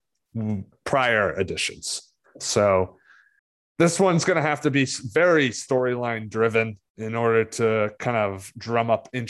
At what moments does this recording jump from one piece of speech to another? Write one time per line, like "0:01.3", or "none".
0:03.4
0:06.9